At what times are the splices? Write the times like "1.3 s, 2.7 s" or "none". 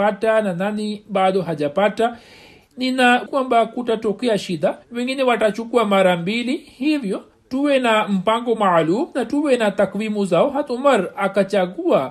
3.3 s, 4.8 s, 7.3 s

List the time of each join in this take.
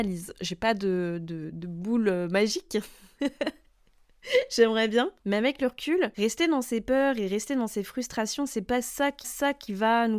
9.2 s

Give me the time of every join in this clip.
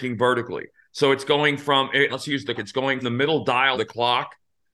2.1 s, 2.6 s, 3.0 s, 3.7 s

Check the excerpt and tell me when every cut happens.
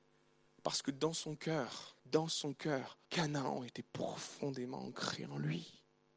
2.0 s, 3.0 s

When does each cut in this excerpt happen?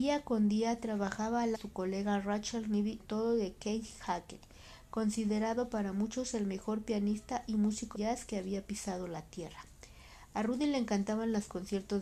1.5 s, 3.0 s, 7.9 s

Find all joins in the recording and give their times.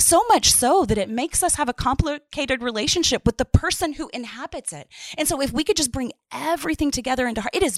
none

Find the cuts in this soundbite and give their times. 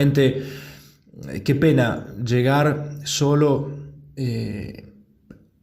none

